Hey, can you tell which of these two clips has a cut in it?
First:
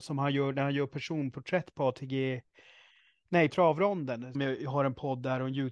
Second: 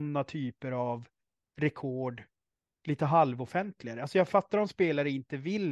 first; 2 cuts; at 3.5 s, 4.3 s

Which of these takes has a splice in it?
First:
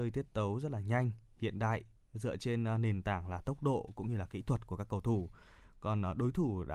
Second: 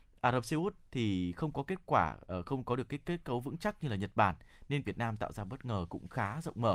second; 1 cut; at 4.8 s

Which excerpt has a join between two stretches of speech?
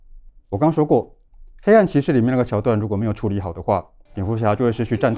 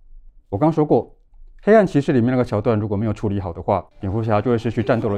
second; 1 cut; at 3.9 s

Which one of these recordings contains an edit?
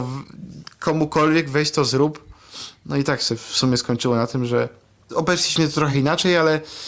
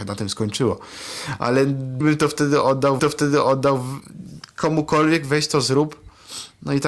second; 2 cuts; at 2.0 s, 3.0 s

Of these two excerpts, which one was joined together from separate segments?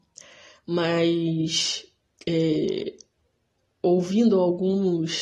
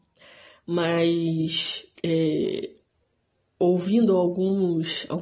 second; 1 cut; at 2.0 s

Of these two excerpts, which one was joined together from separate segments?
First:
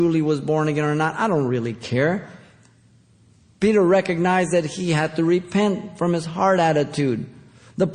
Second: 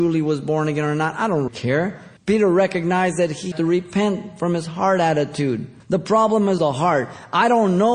second; 5 cuts; at 1.5 s, 2.2 s, 3.5 s, 5.8 s, 6.6 s

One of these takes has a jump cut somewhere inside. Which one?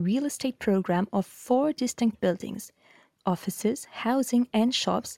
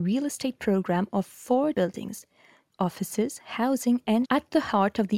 second; 2 cuts; at 1.7 s, 4.2 s

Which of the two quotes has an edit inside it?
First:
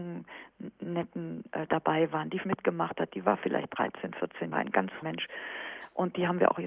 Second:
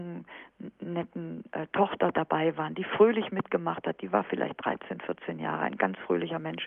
first; 4 cuts; at 1.7 s, 2.4 s, 4.5 s, 5.0 s

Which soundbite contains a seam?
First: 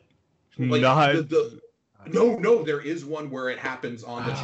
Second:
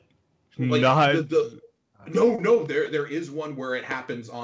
first; 1 cut; at 2.6 s

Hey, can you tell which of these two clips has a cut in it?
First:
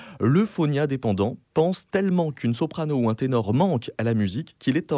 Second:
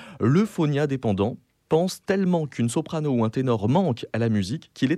first; 1 cut; at 1.4 s

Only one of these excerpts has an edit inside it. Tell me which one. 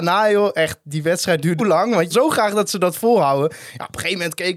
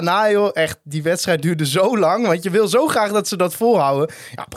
first; 2 cuts; at 1.6 s, 2.1 s

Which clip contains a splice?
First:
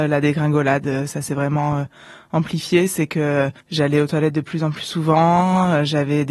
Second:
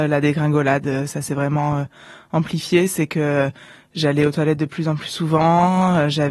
first; 1 cut; at 3.6 s

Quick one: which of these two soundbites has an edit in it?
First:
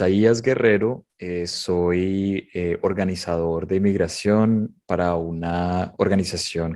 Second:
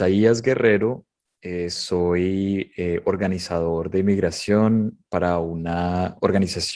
first; 1 cut; at 1.1 s

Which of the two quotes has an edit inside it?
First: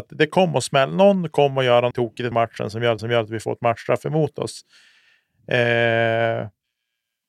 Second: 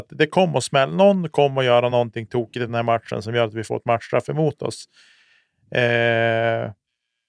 first; 3 cuts; at 1.9 s, 2.3 s, 3.0 s

